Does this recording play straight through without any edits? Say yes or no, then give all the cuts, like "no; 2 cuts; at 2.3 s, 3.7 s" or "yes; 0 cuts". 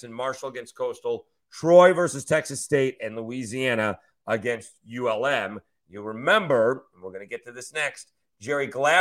yes; 0 cuts